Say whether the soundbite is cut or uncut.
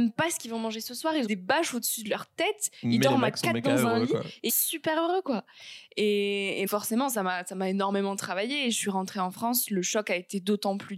cut